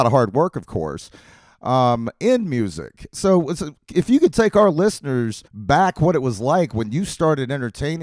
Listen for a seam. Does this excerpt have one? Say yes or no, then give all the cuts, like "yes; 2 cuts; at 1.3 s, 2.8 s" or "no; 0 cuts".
yes; 1 cut; at 5.5 s